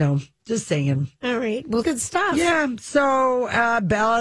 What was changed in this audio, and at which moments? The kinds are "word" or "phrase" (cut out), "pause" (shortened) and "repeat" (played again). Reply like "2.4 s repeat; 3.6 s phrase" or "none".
1.8 s word